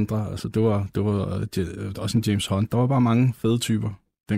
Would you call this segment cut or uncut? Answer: uncut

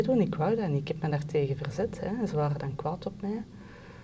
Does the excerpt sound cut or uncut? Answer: uncut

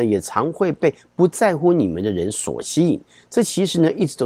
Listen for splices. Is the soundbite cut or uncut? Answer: uncut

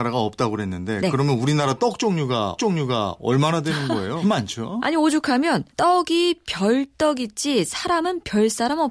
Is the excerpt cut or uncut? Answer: cut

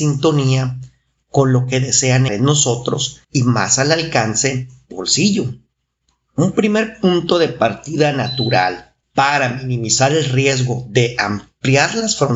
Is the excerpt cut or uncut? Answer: cut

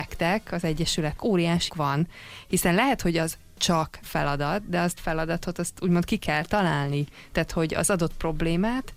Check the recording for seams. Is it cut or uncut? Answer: cut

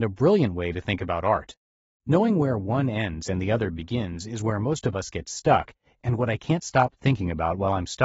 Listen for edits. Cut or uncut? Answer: uncut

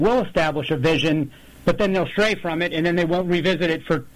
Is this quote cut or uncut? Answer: uncut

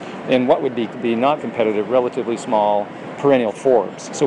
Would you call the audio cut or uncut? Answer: cut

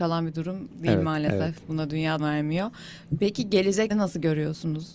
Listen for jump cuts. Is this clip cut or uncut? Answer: cut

